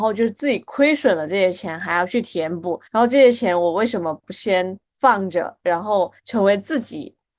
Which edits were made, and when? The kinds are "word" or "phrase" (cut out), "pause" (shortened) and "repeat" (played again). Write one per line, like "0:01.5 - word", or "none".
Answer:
0:02.9 - pause
0:06.2 - pause

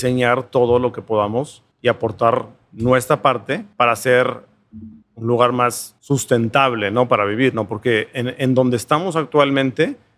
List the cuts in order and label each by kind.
0:01.7 - pause
0:03.7 - pause
0:05.0 - pause
0:06.0 - pause

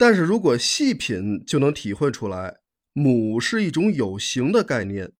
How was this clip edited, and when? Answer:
0:02.7 - pause

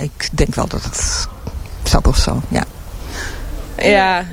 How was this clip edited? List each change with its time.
0:02.0 - word

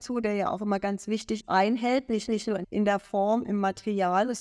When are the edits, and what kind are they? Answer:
0:01.4 - phrase
0:02.3 - repeat
0:02.6 - phrase

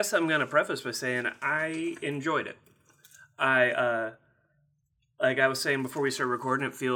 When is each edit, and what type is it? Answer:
none

